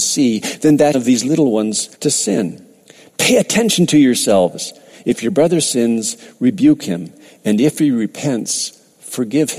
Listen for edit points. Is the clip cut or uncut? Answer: cut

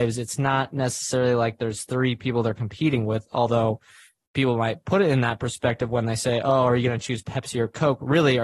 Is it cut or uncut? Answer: uncut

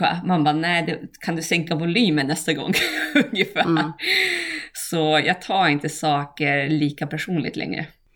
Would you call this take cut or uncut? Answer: uncut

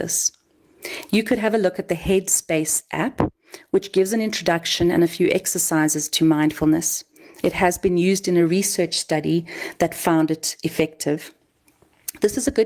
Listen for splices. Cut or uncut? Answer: uncut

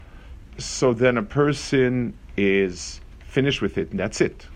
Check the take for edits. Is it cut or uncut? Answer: uncut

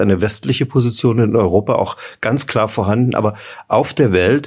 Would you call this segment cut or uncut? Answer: uncut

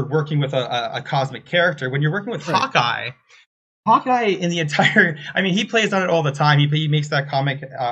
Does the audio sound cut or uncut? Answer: uncut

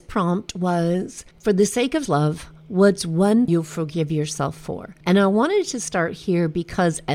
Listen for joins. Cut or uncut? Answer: cut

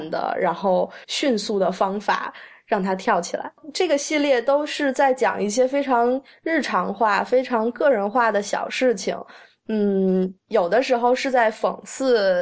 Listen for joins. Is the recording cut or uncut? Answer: cut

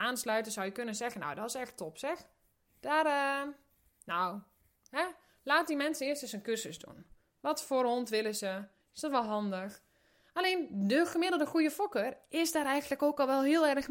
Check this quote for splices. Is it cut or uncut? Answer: uncut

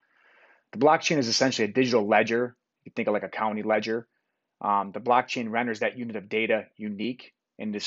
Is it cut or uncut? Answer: uncut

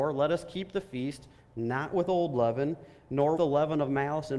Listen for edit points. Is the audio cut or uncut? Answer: cut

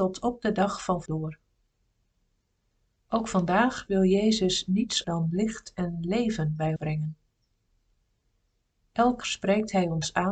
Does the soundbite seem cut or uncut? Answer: cut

